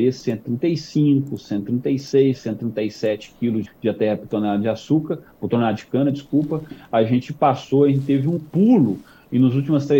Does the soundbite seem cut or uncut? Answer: cut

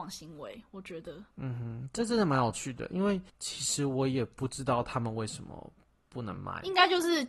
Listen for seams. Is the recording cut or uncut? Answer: cut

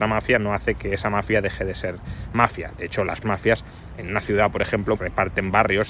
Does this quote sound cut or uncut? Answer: cut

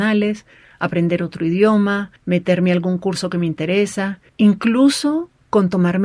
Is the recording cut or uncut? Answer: cut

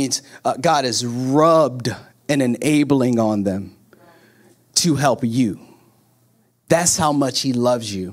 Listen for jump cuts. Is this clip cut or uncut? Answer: uncut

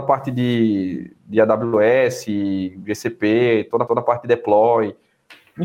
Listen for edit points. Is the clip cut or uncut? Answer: cut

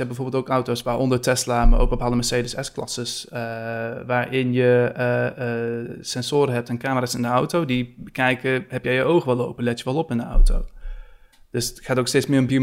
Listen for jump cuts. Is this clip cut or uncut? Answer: uncut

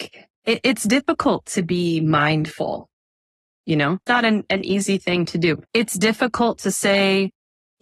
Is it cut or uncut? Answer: cut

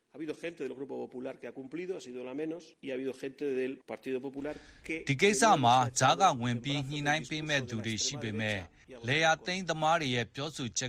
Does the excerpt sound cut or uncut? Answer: cut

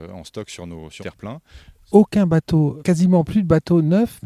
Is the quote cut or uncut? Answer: cut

